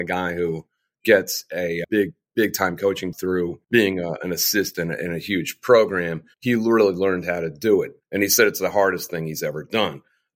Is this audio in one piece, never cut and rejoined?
no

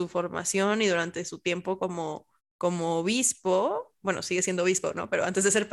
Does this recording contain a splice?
no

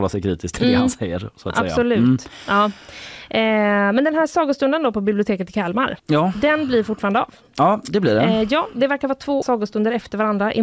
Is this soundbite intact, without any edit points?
no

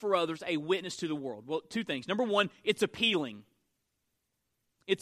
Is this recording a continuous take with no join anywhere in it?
yes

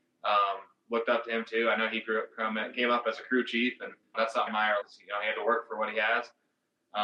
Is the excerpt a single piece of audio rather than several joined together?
no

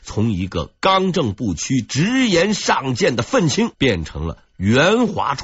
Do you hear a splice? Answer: yes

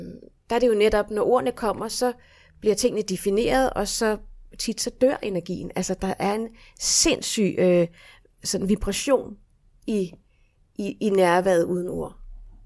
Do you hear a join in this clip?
no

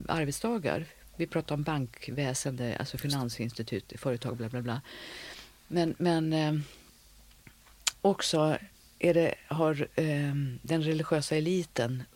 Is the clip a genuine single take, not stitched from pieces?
yes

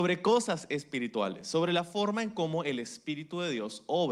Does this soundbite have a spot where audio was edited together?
no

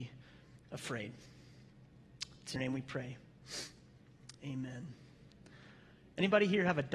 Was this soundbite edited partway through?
yes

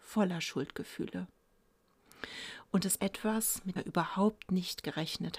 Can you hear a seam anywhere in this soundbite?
yes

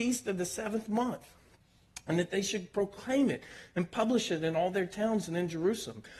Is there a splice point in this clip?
no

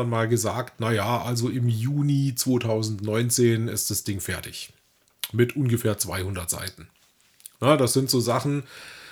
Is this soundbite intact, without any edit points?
yes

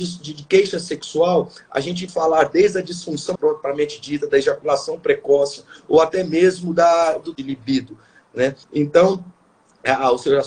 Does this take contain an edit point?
yes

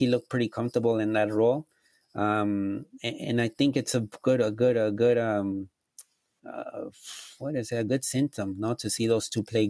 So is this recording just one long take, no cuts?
yes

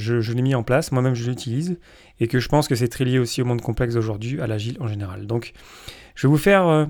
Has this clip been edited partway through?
no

